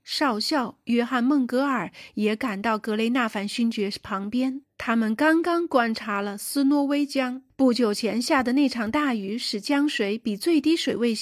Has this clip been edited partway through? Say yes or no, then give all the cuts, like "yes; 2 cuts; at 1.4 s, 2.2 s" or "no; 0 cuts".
yes; 2 cuts; at 4.6 s, 7.5 s